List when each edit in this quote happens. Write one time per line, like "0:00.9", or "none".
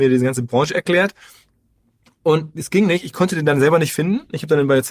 none

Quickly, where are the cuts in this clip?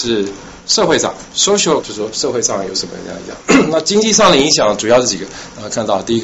0:01.8

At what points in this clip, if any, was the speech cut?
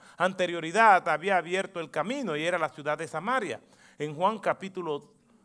none

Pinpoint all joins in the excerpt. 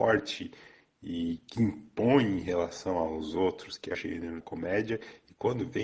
0:01.5
0:03.9
0:04.4

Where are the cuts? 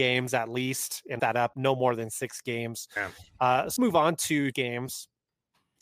0:01.2
0:01.5
0:03.8
0:04.5

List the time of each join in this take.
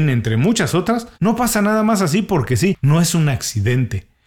0:01.1

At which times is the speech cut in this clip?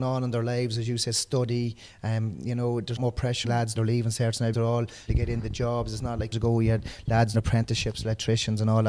0:03.0
0:03.4
0:03.7
0:04.5
0:05.1
0:06.3
0:07.3

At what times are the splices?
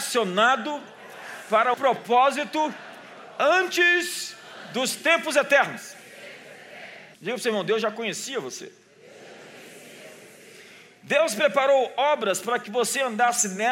0:01.7
0:07.1

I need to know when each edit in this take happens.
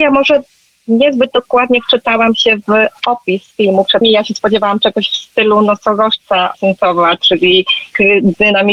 0:04.0
0:06.5

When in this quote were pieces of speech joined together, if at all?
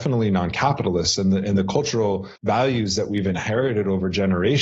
0:02.4

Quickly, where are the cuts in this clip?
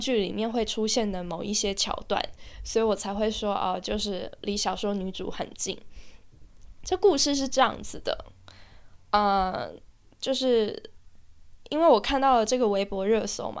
none

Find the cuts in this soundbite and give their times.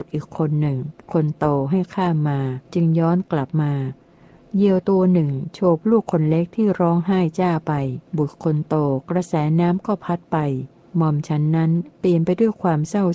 0:01.0
0:02.7
0:08.1
0:10.8

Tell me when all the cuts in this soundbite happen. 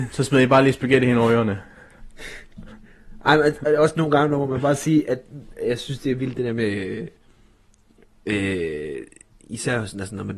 none

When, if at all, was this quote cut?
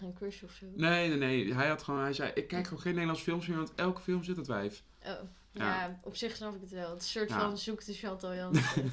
none

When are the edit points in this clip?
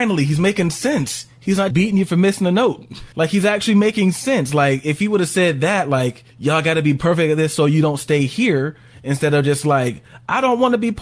0:01.7
0:03.1
0:06.3

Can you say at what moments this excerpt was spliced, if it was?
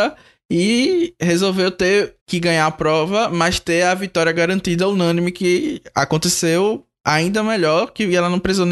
0:02.2

